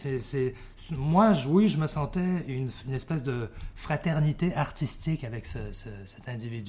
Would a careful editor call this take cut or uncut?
uncut